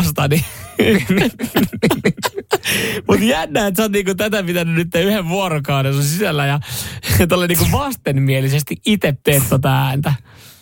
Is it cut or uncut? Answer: cut